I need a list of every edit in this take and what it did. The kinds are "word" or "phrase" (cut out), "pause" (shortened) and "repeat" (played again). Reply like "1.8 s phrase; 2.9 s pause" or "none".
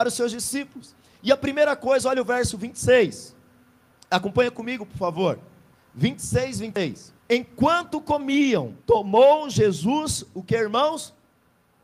5.7 s pause; 7.2 s pause; 8.8 s pause